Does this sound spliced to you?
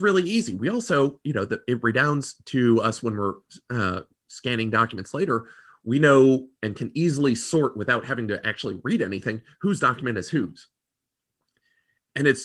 no; 0 cuts

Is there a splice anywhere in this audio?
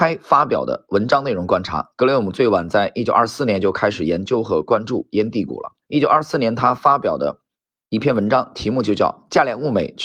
yes; 2 cuts; at 5.8 s, 7.5 s

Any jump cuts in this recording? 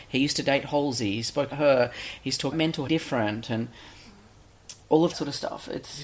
yes; 5 cuts; at 1.5 s, 2.5 s, 2.9 s, 4.8 s, 5.1 s

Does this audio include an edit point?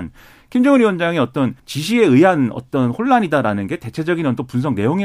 yes; 1 cut; at 1.6 s

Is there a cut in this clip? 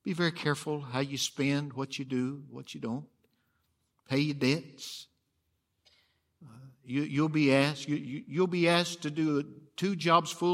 no; 0 cuts

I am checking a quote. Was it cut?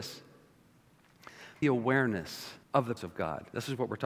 yes; 3 cuts; at 1.6 s, 2.6 s, 3.0 s

